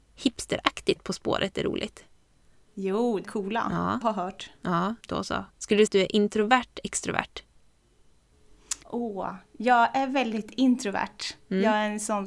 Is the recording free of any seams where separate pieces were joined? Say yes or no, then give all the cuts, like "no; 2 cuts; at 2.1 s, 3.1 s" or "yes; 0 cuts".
no; 8 cuts; at 1.0 s, 3.2 s, 4.0 s, 5.0 s, 5.5 s, 5.9 s, 6.8 s, 8.8 s